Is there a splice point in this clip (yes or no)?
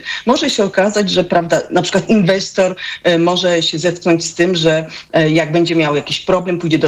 no